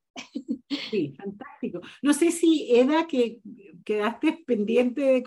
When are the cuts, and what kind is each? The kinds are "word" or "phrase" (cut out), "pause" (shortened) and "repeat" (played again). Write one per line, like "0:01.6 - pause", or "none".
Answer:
0:03.8 - pause